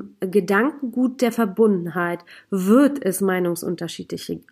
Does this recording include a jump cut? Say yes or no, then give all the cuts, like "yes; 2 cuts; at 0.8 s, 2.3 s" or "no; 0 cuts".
no; 0 cuts